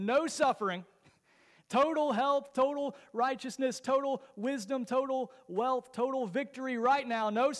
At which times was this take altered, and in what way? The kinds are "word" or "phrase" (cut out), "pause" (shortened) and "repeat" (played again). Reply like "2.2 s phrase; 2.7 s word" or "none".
none